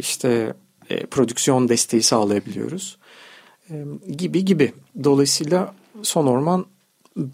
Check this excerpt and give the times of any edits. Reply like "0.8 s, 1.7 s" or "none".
none